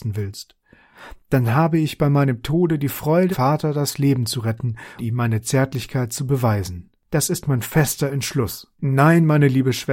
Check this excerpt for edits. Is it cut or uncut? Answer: cut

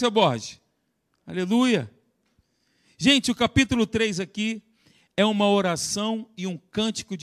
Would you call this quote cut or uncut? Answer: uncut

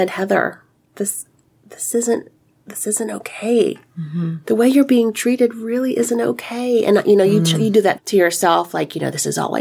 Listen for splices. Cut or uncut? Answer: cut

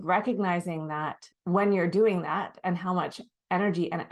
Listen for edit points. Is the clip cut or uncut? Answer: cut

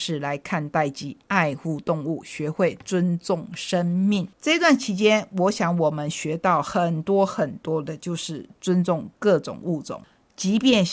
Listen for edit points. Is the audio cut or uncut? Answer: cut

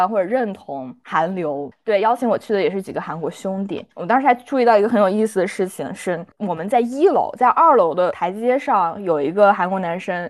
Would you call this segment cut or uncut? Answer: cut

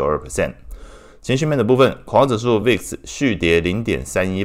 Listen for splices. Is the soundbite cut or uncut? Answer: uncut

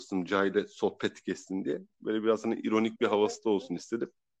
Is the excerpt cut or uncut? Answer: uncut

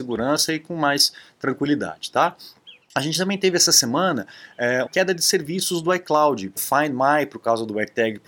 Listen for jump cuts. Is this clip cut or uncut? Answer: cut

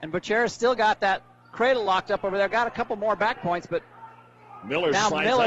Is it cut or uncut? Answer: uncut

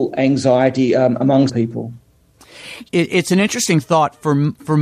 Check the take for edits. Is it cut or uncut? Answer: cut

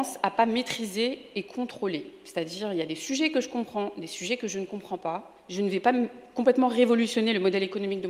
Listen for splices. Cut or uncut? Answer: uncut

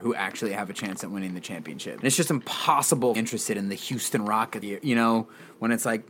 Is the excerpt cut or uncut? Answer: cut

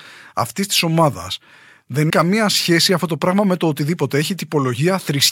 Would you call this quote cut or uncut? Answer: cut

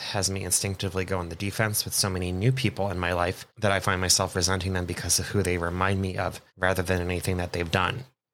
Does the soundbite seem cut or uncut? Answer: cut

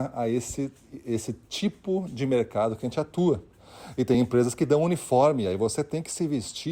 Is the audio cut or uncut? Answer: uncut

